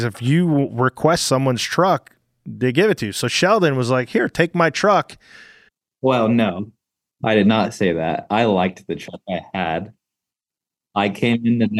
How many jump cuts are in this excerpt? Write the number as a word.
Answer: zero